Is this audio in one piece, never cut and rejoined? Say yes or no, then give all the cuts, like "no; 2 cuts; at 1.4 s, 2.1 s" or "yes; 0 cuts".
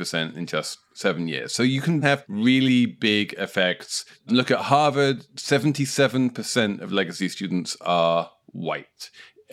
yes; 0 cuts